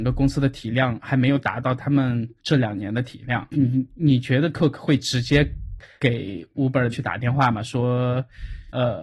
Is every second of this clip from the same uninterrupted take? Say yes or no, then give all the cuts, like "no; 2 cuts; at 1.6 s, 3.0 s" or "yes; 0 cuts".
no; 3 cuts; at 2.4 s, 4.5 s, 6.9 s